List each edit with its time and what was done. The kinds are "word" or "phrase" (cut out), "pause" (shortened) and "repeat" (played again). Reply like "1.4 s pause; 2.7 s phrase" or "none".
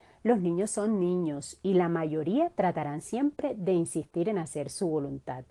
none

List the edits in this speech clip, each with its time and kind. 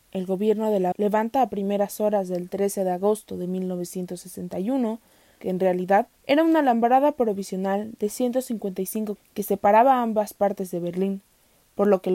0.9 s word; 5.4 s phrase; 6.1 s pause; 9.2 s word

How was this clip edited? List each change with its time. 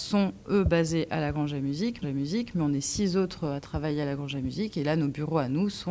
2.0 s repeat

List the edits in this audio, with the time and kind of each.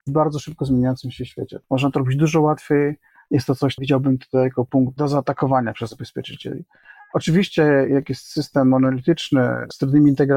3.8 s word

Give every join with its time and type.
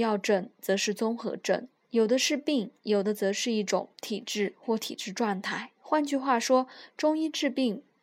1.8 s pause; 2.8 s pause; 5.8 s pause

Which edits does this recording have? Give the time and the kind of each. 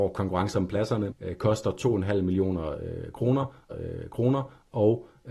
1.1 s word; 3.7 s repeat

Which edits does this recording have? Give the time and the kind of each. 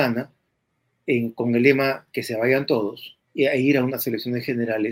3.2 s pause

